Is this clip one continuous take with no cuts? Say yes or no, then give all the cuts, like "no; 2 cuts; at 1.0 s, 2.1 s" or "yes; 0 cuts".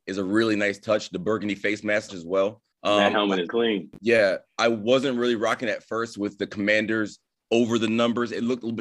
no; 4 cuts; at 2.1 s, 2.7 s, 3.5 s, 7.3 s